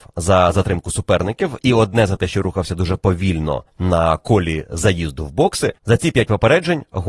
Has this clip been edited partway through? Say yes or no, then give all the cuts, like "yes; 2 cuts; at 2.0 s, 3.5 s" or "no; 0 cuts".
yes; 2 cuts; at 3.7 s, 5.8 s